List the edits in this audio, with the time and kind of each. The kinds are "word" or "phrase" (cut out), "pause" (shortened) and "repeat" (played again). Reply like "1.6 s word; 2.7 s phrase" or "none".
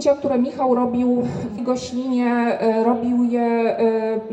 1.6 s word